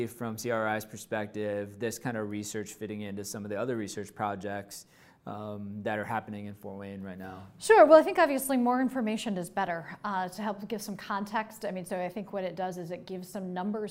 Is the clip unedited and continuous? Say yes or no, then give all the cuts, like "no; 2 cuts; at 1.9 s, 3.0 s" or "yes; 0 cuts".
yes; 0 cuts